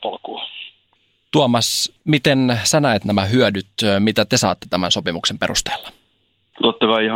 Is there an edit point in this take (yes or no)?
no